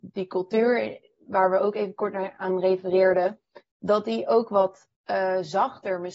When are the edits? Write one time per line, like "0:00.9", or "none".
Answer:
0:04.9

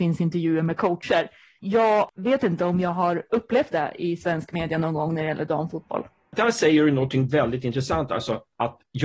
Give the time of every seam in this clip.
none

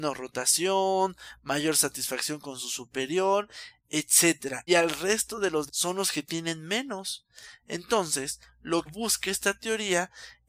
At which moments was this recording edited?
0:04.7
0:05.7
0:08.9

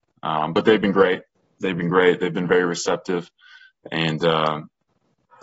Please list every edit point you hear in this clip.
none

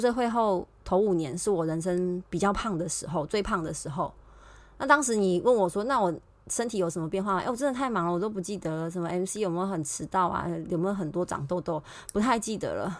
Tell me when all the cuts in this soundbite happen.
none

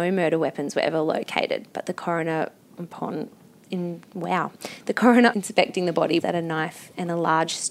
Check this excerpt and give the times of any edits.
0:03.6
0:05.3
0:06.2

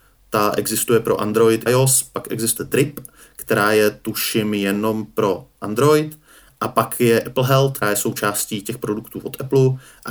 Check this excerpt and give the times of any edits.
0:01.7
0:02.6
0:07.2
0:07.8

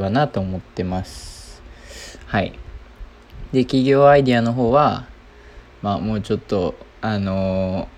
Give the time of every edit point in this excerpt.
0:06.9

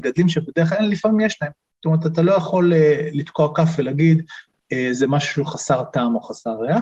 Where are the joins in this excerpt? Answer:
none

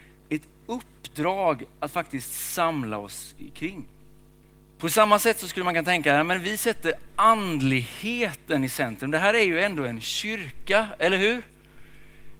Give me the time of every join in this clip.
none

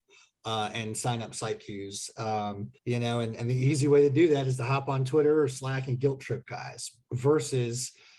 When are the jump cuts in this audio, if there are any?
0:02.8

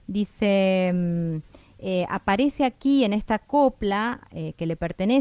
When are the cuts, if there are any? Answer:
none

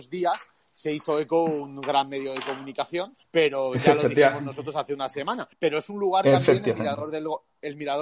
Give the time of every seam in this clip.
0:03.2
0:05.5

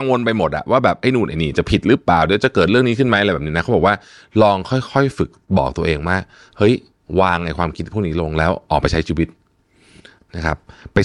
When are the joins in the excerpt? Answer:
none

